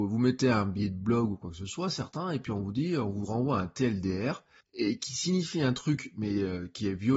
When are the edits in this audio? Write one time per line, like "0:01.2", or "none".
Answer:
0:04.6